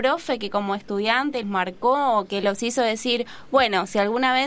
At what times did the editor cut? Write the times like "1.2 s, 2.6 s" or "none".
1.4 s